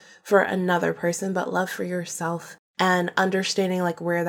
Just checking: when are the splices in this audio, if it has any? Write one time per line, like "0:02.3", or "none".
0:02.7